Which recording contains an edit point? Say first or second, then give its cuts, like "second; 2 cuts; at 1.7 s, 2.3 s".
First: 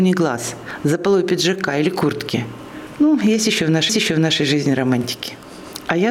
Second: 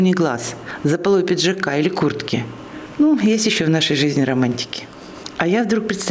first; 1 cut; at 3.9 s